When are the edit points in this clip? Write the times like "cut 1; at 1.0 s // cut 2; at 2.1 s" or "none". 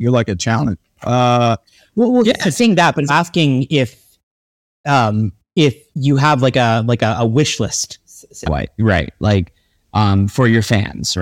cut 1; at 3.1 s // cut 2; at 8.4 s